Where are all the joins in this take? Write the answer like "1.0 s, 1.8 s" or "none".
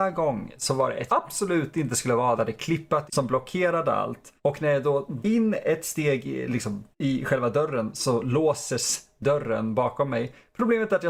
1.1 s, 2.4 s, 3.1 s, 4.4 s, 5.2 s, 6.9 s